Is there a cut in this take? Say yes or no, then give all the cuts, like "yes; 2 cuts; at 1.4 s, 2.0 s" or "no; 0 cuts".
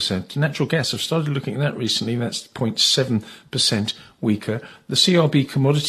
no; 0 cuts